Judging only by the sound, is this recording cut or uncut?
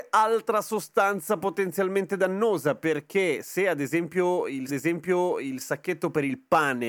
cut